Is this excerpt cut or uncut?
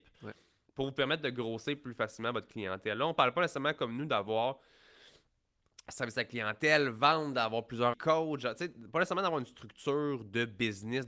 cut